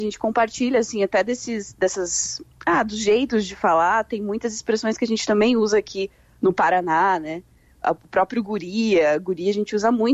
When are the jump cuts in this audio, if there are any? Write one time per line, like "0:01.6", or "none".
none

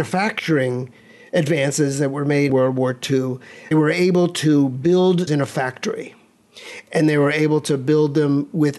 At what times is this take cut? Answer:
0:02.5
0:03.7
0:05.3

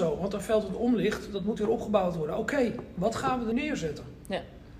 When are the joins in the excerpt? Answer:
0:03.5

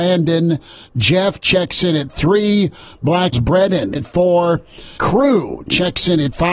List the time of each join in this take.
0:03.3
0:04.0
0:05.0

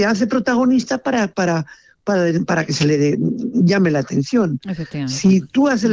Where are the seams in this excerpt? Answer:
none

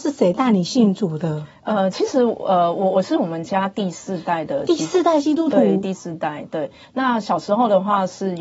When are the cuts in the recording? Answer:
none

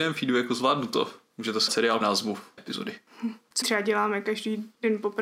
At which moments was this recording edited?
0:01.7
0:02.0
0:02.6
0:03.6

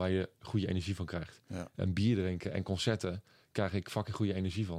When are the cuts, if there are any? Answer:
none

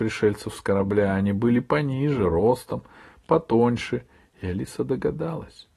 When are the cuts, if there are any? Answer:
none

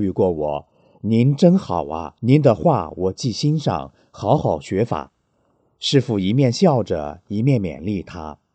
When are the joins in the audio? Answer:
0:02.2

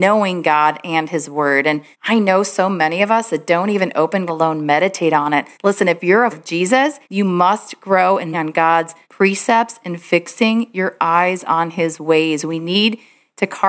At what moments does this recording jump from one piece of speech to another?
0:01.9
0:04.3
0:05.5
0:06.3
0:07.0
0:08.3
0:09.0

